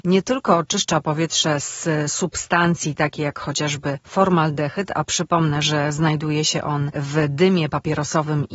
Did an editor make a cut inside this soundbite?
no; 0 cuts

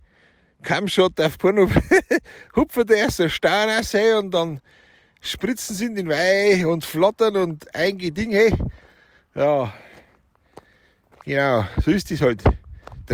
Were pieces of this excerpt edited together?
no; 0 cuts

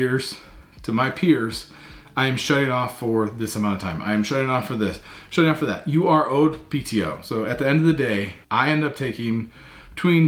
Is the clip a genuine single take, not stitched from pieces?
no; 1 cut; at 8.4 s

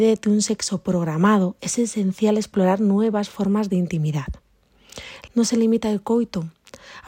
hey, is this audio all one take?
no; 1 cut; at 5.3 s

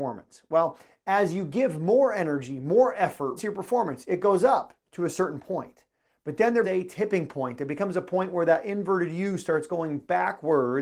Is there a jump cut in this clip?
yes; 2 cuts; at 3.4 s, 6.6 s

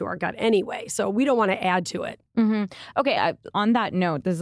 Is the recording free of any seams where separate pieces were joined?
no; 2 cuts; at 3.2 s, 3.5 s

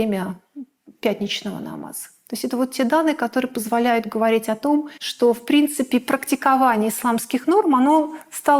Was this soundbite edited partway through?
yes; 1 cut; at 5.0 s

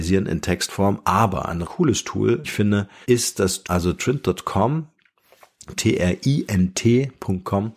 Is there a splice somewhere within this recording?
yes; 5 cuts; at 1.6 s, 2.4 s, 3.0 s, 3.6 s, 5.8 s

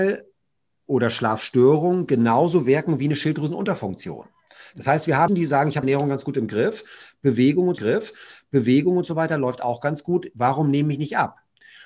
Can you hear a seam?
yes; 3 cuts; at 5.3 s, 5.8 s, 7.8 s

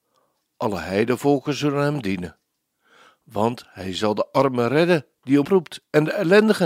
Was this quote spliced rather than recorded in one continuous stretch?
yes; 1 cut; at 5.4 s

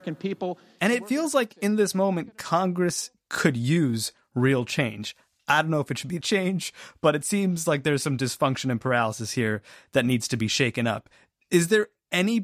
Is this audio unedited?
no; 1 cut; at 6.2 s

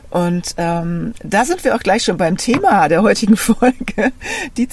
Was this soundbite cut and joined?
no; 0 cuts

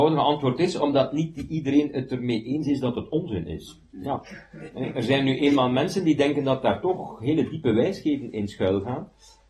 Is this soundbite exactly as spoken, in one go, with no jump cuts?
yes; 0 cuts

